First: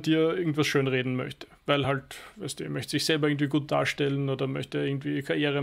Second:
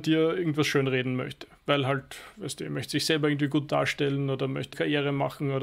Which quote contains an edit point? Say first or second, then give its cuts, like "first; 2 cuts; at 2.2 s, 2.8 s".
second; 1 cut; at 4.7 s